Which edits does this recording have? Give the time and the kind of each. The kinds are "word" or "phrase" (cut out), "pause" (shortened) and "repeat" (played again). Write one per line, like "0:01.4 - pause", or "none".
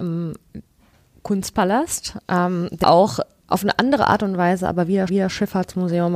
0:02.8 - word
0:03.4 - word
0:05.1 - repeat